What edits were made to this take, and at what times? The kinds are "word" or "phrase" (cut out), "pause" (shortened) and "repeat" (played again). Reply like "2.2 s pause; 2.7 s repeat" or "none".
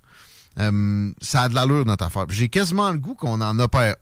none